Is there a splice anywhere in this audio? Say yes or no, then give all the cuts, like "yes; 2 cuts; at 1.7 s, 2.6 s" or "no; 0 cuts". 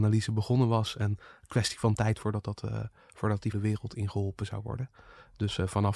yes; 1 cut; at 3.5 s